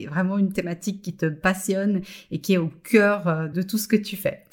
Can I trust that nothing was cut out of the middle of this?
yes; 0 cuts

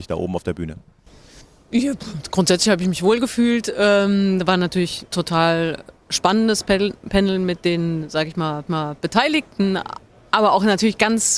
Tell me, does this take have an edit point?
yes; 2 cuts; at 5.1 s, 8.7 s

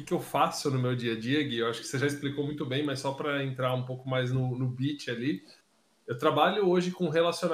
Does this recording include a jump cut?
no; 0 cuts

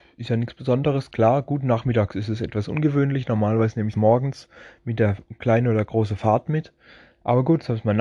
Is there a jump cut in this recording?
yes; 1 cut; at 3.9 s

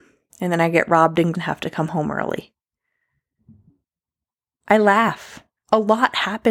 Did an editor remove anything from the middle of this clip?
yes; 1 cut; at 1.3 s

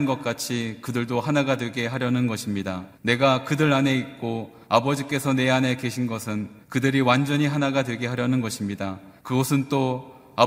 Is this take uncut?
no; 4 cuts; at 2.9 s, 4.6 s, 6.6 s, 9.2 s

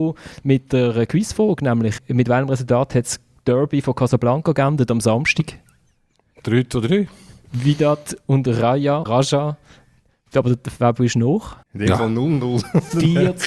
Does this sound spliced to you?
yes; 2 cuts; at 9.1 s, 11.6 s

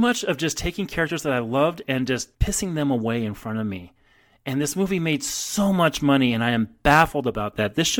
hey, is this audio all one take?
no; 1 cut; at 2.3 s

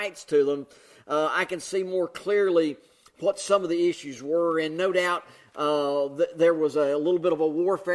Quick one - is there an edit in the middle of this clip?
no; 0 cuts

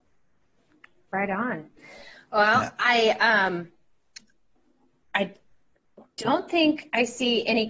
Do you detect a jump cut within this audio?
no; 0 cuts

